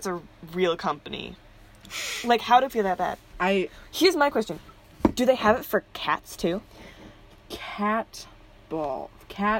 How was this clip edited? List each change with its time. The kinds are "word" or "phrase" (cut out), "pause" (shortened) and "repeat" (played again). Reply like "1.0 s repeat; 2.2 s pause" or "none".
2.7 s word; 3.3 s pause